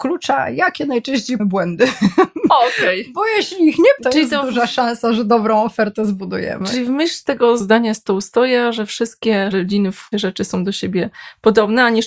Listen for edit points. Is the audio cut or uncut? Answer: cut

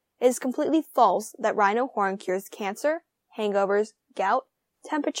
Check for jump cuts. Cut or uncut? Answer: uncut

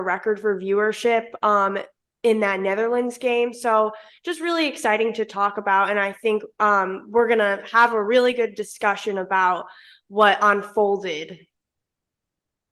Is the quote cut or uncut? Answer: uncut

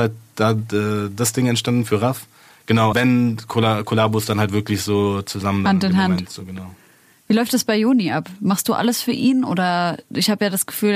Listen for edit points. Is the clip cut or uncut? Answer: cut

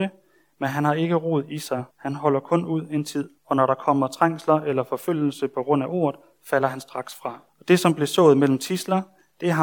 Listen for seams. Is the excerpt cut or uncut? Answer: cut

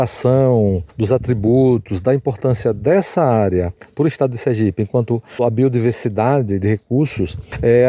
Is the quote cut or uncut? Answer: uncut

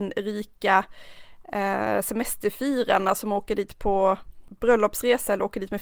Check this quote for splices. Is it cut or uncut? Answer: uncut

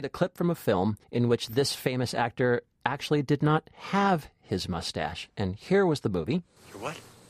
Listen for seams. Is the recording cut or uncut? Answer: cut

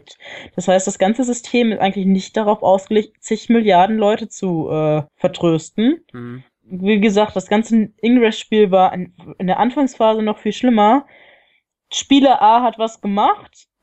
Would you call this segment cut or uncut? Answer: cut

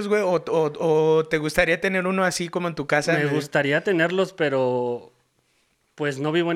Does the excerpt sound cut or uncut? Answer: uncut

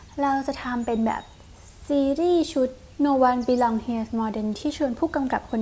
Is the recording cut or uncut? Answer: cut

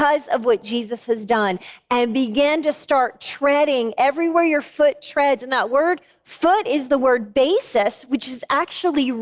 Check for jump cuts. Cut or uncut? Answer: uncut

